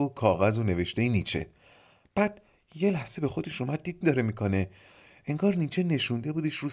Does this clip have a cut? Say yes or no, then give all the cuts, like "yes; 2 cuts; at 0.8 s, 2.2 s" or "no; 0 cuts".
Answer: yes; 1 cut; at 4.0 s